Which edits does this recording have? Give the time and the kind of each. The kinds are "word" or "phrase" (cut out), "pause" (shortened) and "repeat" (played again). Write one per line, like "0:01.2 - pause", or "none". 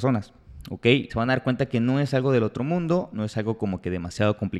0:01.1 - word